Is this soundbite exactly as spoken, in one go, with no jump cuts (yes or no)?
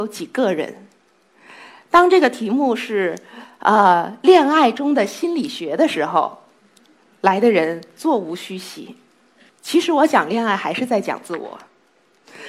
yes